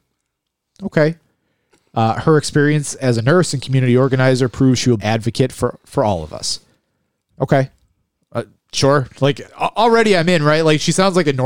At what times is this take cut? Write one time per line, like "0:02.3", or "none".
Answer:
0:05.0
0:09.4